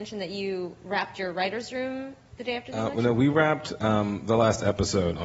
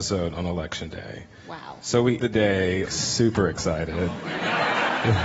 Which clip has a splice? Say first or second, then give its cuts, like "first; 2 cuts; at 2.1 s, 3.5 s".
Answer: second; 2 cuts; at 2.2 s, 2.9 s